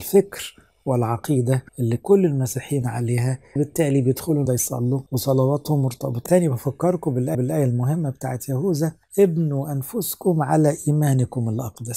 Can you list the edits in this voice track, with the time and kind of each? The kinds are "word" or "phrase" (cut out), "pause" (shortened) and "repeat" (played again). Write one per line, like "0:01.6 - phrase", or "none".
0:01.7 - pause
0:02.8 - word
0:03.6 - word
0:04.5 - word
0:05.1 - pause
0:06.3 - phrase
0:07.3 - repeat
0:09.0 - pause